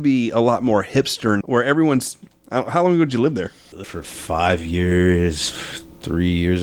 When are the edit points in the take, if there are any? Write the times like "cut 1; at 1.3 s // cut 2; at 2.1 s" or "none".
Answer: cut 1; at 1.4 s // cut 2; at 3.8 s